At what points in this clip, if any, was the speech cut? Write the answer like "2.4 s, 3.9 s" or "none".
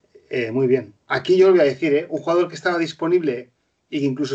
1.0 s